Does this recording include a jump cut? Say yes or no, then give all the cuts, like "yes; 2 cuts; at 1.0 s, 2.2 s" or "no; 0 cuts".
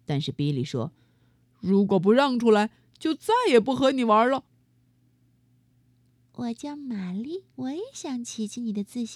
yes; 1 cut; at 7.5 s